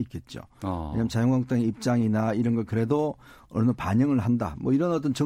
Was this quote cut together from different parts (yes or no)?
no